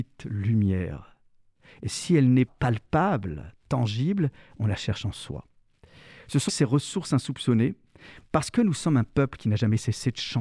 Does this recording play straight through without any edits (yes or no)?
no